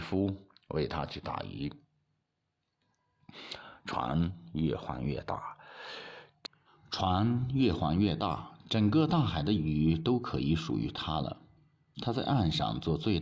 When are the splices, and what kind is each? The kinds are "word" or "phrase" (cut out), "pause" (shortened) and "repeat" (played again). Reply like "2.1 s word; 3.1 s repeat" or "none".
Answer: 6.7 s pause